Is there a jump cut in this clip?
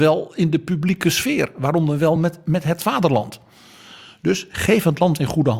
no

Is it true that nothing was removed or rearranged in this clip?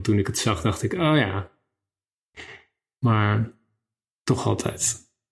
yes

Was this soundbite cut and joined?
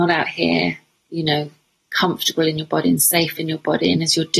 no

